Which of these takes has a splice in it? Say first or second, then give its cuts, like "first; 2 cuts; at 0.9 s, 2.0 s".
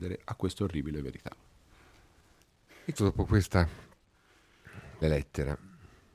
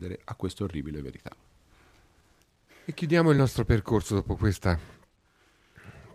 first; 2 cuts; at 3.0 s, 5.0 s